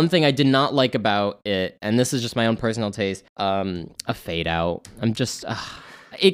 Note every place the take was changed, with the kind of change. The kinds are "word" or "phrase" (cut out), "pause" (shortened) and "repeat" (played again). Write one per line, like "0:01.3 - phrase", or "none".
0:03.3 - pause